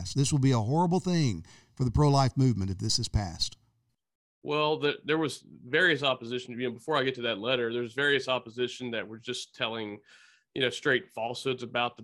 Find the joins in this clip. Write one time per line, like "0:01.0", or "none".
none